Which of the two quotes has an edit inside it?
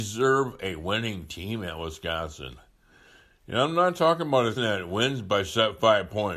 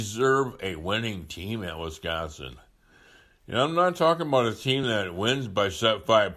first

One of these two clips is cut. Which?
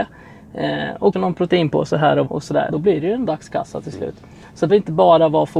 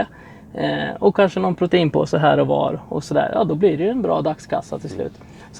first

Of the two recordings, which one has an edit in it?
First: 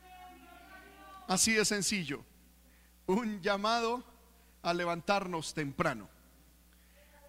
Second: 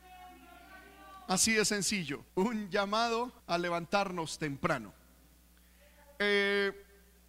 second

